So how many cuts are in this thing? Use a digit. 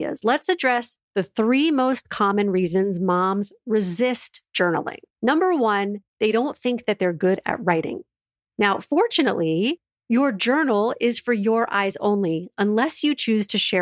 4